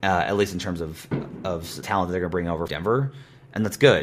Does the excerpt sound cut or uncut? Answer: cut